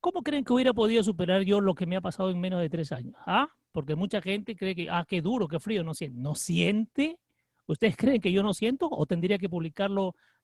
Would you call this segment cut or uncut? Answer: uncut